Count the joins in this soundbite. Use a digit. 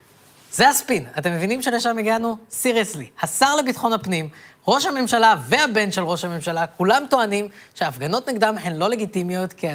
0